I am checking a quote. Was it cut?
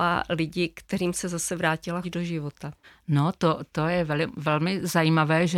yes; 2 cuts; at 2.0 s, 2.8 s

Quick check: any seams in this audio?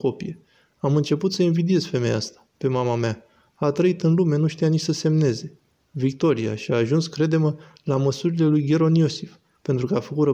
no; 0 cuts

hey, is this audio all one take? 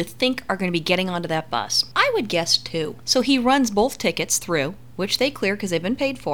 yes; 0 cuts

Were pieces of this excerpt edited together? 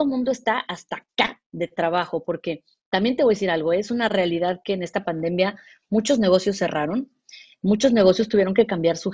no; 0 cuts

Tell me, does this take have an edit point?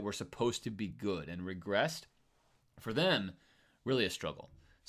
no; 0 cuts

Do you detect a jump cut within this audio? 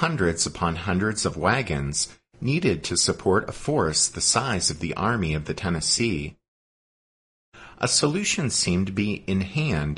no; 0 cuts

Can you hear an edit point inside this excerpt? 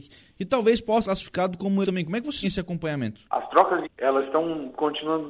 yes; 5 cuts; at 1.0 s, 1.8 s, 2.4 s, 3.3 s, 3.8 s

